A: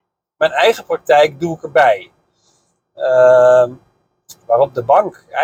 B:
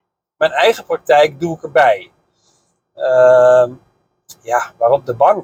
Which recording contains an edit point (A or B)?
A